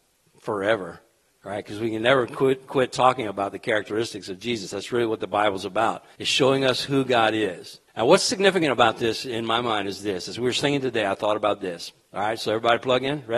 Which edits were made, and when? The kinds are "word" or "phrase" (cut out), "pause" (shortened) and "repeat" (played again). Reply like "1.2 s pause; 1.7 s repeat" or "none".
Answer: 1.3 s pause; 6.1 s pause; 7.9 s pause